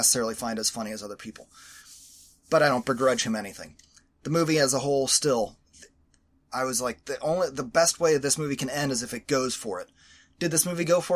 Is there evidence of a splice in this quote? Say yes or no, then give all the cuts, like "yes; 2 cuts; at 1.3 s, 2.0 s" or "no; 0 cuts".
no; 0 cuts